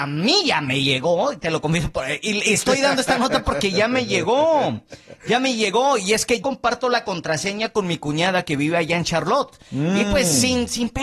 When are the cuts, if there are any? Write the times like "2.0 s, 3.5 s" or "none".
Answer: 6.4 s